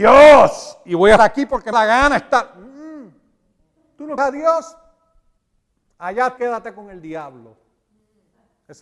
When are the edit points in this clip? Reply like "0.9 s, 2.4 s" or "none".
1.2 s, 1.7 s, 4.2 s, 6.4 s